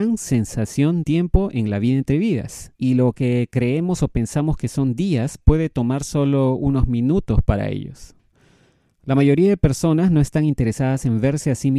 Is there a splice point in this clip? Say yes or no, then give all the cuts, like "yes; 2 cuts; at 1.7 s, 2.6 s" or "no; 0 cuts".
yes; 2 cuts; at 1.0 s, 2.7 s